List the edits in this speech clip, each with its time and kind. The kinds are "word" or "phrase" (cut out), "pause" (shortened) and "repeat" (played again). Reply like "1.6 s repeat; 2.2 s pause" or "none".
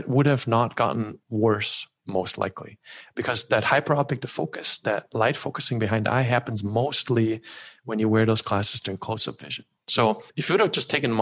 10.3 s pause